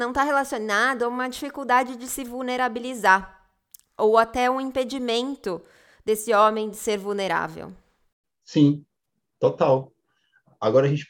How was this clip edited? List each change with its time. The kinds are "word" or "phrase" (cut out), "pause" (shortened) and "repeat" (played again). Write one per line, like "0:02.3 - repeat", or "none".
none